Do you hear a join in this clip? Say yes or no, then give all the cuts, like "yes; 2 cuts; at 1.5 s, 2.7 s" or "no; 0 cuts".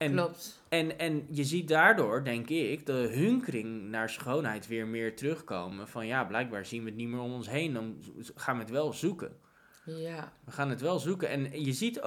no; 0 cuts